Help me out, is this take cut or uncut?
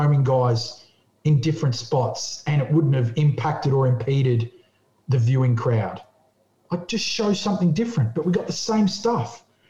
uncut